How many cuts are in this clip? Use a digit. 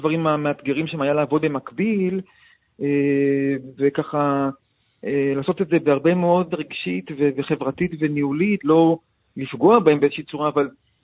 3